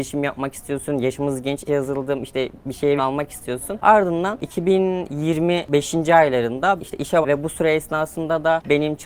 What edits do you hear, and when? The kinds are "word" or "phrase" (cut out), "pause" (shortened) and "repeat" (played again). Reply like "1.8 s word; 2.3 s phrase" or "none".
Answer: 1.7 s word; 3.0 s word; 6.8 s word; 7.2 s word